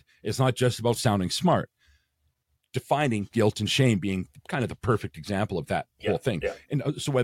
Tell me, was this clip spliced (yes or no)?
no